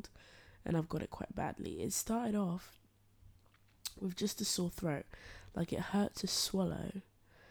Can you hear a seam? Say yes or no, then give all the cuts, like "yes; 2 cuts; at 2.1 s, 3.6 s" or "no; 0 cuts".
no; 0 cuts